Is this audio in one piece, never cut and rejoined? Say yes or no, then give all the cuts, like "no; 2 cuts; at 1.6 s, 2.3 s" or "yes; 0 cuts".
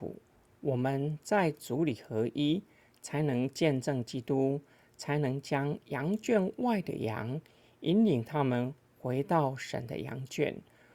yes; 0 cuts